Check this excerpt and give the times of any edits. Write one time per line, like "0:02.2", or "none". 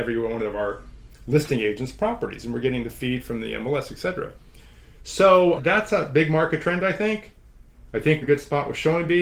0:05.6
0:08.2